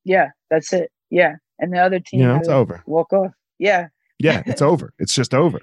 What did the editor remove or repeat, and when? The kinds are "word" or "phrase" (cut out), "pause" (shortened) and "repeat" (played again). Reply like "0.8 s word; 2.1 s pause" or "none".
1.0 s pause; 2.4 s word